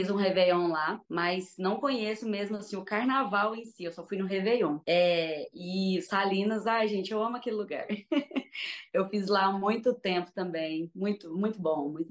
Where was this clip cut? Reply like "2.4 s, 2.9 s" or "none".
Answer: 1.0 s, 4.8 s

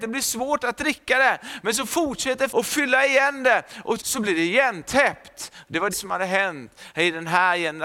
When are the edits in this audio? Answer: 2.5 s, 4.0 s, 5.9 s

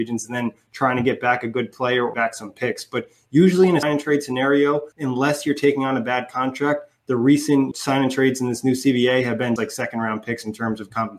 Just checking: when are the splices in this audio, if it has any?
2.1 s, 3.8 s, 4.9 s, 7.7 s, 9.6 s

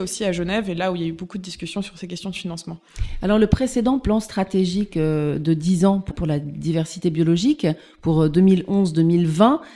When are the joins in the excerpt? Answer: 6.1 s

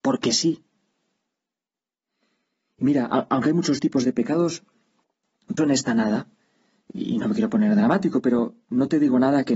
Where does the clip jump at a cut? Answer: 5.6 s

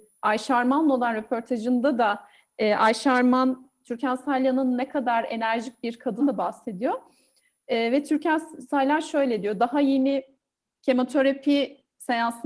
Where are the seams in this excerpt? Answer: 6.2 s

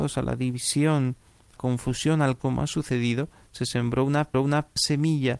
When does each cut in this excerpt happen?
1.6 s, 2.4 s, 4.3 s

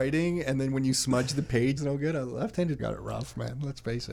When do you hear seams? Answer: 1.8 s, 2.8 s

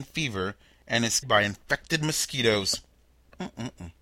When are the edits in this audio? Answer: 1.2 s

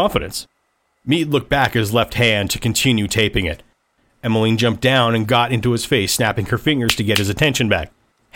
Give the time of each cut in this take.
none

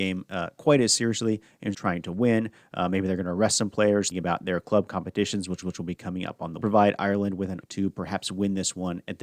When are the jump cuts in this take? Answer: 1.7 s, 4.1 s, 5.6 s, 6.6 s, 7.6 s

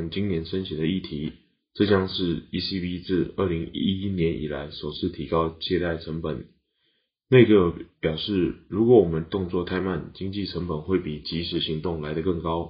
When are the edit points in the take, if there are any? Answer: none

